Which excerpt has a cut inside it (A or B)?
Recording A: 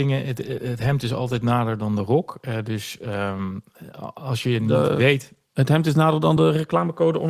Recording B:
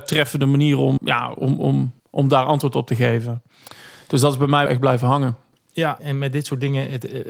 B